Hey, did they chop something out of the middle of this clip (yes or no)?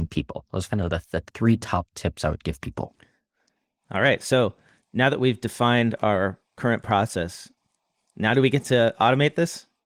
no